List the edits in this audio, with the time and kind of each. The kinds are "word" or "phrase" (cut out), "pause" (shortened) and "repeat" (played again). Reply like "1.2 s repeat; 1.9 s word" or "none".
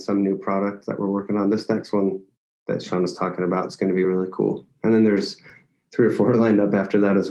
none